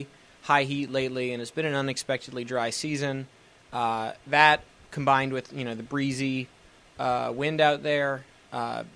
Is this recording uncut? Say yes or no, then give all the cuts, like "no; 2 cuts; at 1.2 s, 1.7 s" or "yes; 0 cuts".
yes; 0 cuts